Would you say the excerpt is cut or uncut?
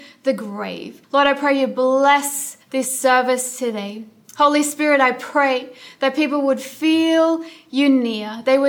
cut